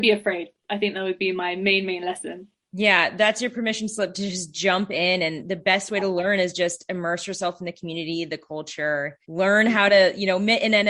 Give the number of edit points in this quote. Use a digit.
1